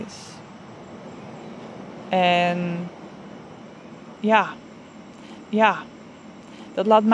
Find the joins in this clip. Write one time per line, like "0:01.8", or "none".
0:05.4